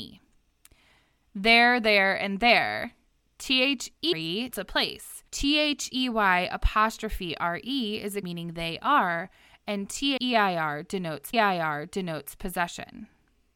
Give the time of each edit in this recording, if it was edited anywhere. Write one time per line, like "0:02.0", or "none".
0:04.1
0:04.5
0:05.3
0:08.2
0:10.2
0:11.3